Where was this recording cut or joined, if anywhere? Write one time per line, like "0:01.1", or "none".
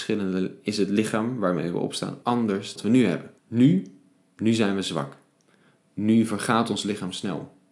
0:02.2
0:02.8
0:03.4

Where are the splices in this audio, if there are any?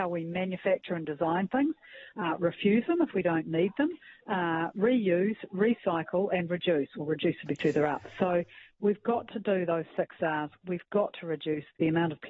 none

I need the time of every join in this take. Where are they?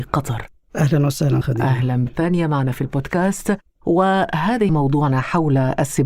0:01.4
0:02.1
0:04.7

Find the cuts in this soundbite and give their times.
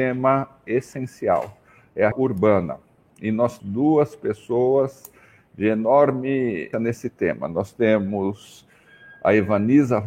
0:02.1
0:03.6
0:06.7

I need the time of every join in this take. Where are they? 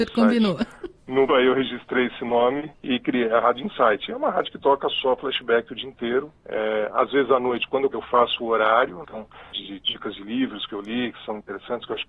0:01.0
0:01.3
0:02.8
0:06.4
0:07.9
0:09.0
0:09.5

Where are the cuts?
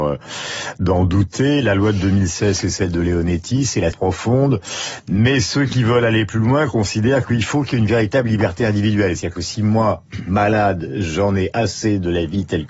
0:03.9

